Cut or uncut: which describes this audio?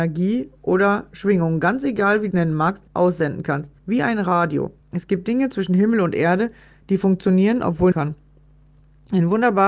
cut